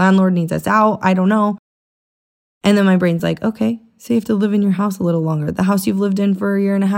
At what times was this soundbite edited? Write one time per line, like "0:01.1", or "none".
none